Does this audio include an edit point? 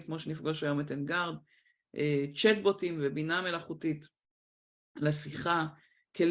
no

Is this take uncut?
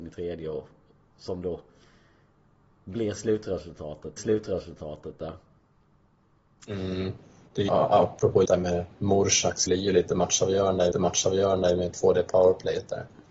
no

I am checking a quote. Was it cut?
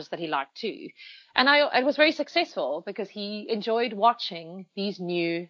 no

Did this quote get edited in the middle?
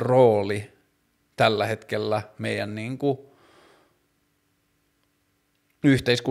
no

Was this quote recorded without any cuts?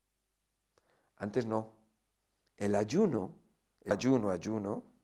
no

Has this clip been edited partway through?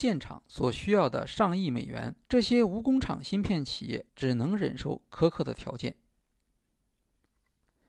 yes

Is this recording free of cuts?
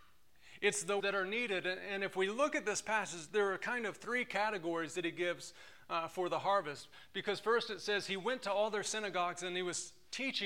no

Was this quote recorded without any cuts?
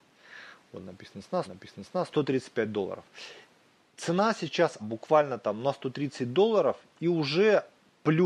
no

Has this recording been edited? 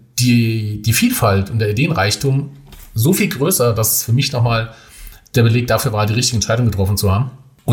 no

